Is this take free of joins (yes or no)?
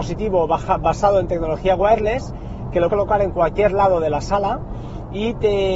no